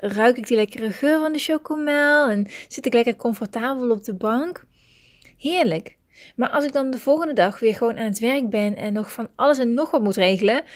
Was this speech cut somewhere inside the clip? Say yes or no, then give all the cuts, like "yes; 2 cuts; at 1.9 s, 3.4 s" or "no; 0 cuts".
no; 0 cuts